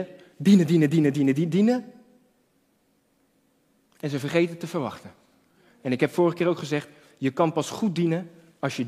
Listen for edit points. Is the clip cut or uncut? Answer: uncut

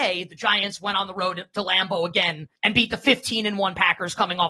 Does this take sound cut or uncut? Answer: cut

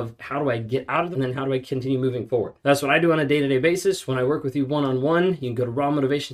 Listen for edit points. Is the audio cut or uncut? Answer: cut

